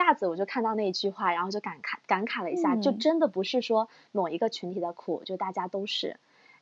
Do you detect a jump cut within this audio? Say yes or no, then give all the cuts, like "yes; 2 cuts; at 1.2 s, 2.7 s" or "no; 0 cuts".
no; 0 cuts